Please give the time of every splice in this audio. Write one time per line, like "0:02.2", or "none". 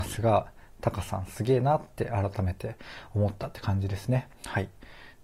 0:04.3